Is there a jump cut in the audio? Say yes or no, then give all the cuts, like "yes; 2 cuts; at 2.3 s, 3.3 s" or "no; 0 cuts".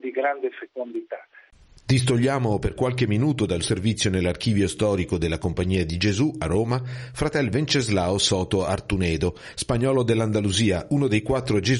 yes; 1 cut; at 3.6 s